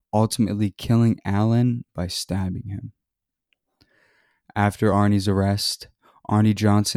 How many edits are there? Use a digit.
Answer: 0